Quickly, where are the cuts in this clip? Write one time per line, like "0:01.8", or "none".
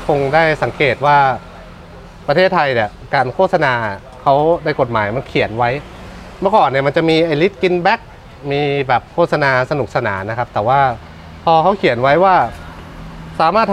0:09.1

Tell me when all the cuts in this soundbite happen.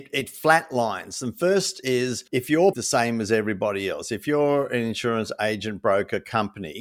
0:02.3
0:02.7

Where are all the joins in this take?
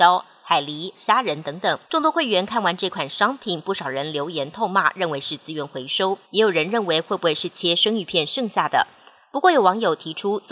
0:00.9
0:01.8
0:06.2

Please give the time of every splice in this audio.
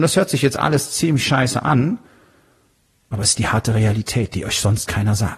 none

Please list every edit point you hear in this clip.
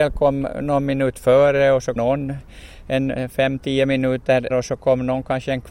0:02.0
0:04.5

